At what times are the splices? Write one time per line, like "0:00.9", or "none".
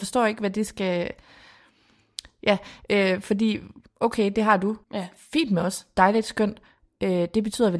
0:04.8